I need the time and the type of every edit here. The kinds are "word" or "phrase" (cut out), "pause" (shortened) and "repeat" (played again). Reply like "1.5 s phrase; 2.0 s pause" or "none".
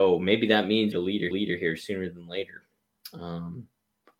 0.9 s phrase; 1.3 s repeat